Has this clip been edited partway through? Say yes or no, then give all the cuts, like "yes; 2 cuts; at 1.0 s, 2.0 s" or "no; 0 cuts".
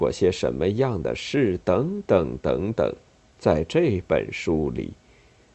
yes; 1 cut; at 3.1 s